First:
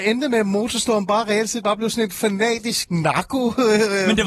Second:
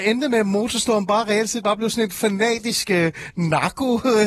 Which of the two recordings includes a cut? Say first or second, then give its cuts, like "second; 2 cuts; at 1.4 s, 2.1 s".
first; 1 cut; at 2.8 s